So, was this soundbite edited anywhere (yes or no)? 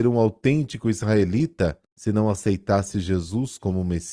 yes